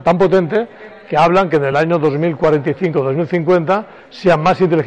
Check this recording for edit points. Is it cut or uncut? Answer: uncut